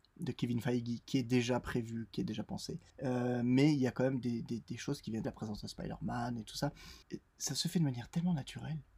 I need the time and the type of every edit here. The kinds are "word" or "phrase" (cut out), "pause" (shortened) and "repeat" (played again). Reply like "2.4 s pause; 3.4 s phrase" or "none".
2.9 s pause; 5.2 s phrase; 7.0 s pause